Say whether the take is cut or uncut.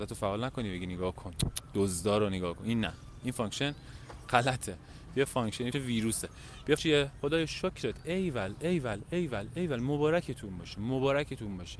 cut